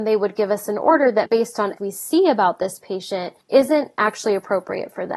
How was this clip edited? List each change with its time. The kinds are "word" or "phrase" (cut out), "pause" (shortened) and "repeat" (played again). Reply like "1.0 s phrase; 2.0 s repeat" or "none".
1.3 s word; 1.8 s phrase; 3.4 s pause